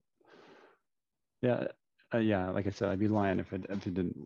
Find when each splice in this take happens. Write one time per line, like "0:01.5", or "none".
none